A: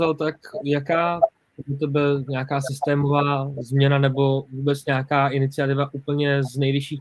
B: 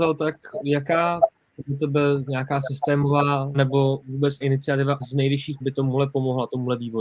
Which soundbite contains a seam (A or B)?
B